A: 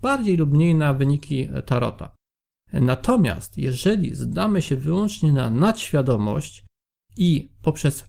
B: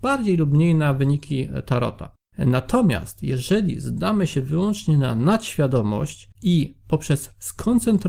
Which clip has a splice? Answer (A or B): B